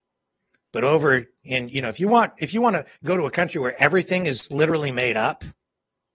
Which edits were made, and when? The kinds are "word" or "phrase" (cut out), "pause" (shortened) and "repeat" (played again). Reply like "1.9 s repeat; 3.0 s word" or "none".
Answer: 3.0 s word